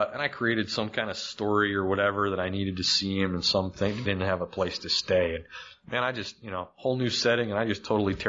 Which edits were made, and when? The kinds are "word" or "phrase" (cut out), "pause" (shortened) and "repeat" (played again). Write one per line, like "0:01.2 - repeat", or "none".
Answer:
0:04.0 - phrase